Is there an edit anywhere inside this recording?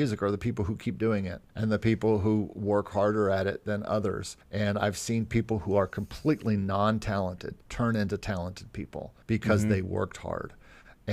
yes; 4 cuts; at 1.5 s, 4.4 s, 7.6 s, 9.2 s

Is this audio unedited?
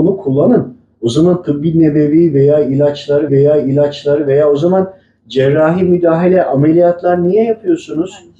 no; 1 cut; at 3.3 s

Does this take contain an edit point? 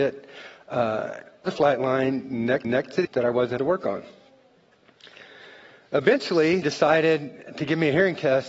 yes; 6 cuts; at 1.5 s, 2.6 s, 3.0 s, 3.6 s, 6.6 s, 7.5 s

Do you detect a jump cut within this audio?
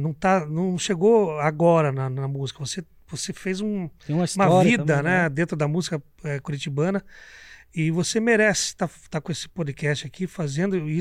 no; 0 cuts

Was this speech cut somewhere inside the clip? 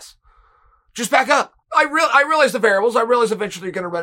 yes; 1 cut; at 1.6 s

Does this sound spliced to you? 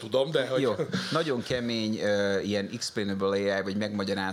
no; 0 cuts

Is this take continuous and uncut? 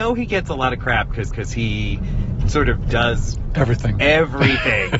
no; 1 cut; at 1.3 s

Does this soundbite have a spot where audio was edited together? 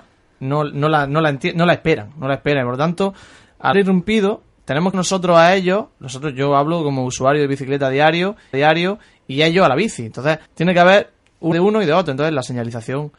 yes; 5 cuts; at 3.7 s, 4.9 s, 8.5 s, 10.5 s, 11.5 s

